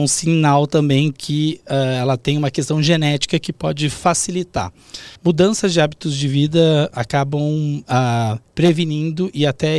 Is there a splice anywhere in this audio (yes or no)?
yes